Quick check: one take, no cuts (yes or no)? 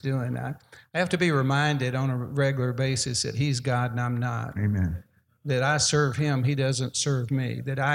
yes